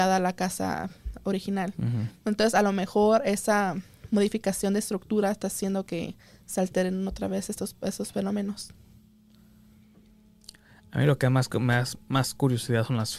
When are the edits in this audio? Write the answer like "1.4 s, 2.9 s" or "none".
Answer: none